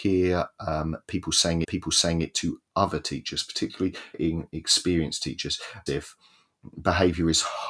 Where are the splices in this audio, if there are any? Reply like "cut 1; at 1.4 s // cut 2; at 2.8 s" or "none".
cut 1; at 1.6 s // cut 2; at 2.7 s // cut 3; at 4.1 s // cut 4; at 5.9 s

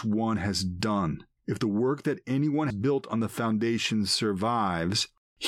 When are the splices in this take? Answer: cut 1; at 1.4 s // cut 2; at 2.7 s

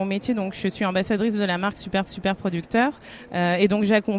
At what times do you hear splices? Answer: cut 1; at 2.1 s

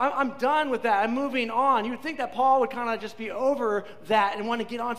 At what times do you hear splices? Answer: none

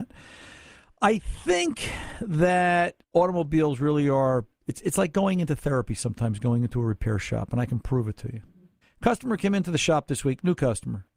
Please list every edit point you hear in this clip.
cut 1; at 3.0 s // cut 2; at 8.8 s

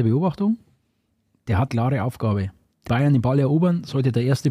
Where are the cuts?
cut 1; at 1.7 s // cut 2; at 2.9 s

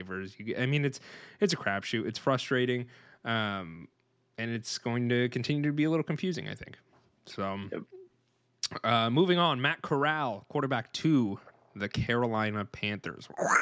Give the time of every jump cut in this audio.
none

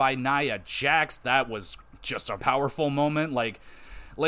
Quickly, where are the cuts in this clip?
cut 1; at 2.4 s

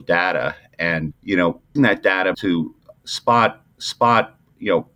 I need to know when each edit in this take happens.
cut 1; at 1.1 s // cut 2; at 1.8 s // cut 3; at 2.3 s // cut 4; at 3.7 s

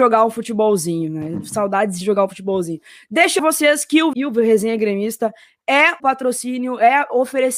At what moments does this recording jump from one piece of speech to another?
cut 1; at 2.0 s // cut 2; at 3.4 s // cut 3; at 4.1 s // cut 4; at 6.0 s

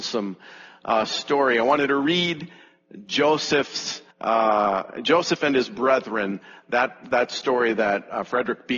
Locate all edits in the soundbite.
cut 1; at 4.1 s

